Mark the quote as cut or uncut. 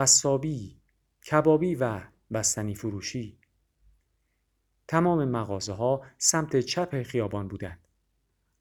uncut